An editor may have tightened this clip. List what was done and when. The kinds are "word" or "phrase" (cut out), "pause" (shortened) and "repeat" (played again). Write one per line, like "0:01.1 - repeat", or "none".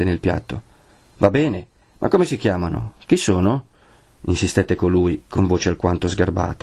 none